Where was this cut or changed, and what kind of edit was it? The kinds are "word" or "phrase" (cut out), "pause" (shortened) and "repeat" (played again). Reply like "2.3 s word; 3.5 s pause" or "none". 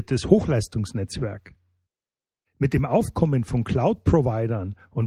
none